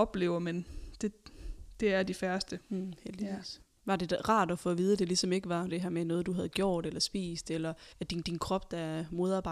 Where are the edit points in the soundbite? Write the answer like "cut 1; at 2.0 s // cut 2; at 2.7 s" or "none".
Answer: cut 1; at 2.6 s // cut 2; at 3.8 s // cut 3; at 5.7 s // cut 4; at 7.9 s // cut 5; at 8.2 s

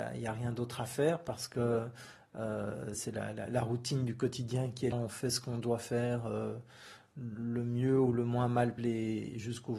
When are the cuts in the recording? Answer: cut 1; at 2.9 s // cut 2; at 4.9 s // cut 3; at 8.8 s

